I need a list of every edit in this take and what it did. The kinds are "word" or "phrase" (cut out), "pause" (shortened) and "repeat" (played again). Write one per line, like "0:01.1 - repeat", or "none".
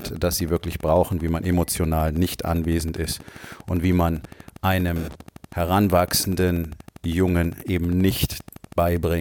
none

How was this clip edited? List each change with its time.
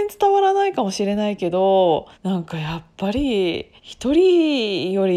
0:02.1 - pause
0:03.8 - pause

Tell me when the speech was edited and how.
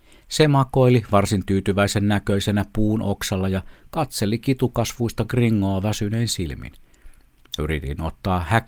none

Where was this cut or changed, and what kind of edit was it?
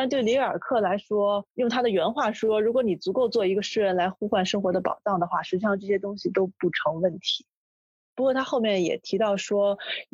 0:01.5 - pause

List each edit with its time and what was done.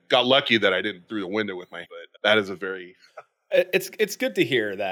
0:01.1 - word
0:01.8 - word
0:02.1 - word
0:03.1 - phrase

